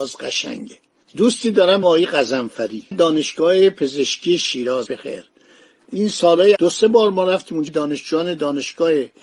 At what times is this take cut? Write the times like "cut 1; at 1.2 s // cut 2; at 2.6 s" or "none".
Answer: cut 1; at 1.8 s // cut 2; at 2.9 s // cut 3; at 4.9 s // cut 4; at 6.6 s // cut 5; at 7.7 s